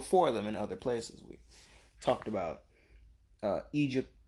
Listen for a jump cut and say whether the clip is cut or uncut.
uncut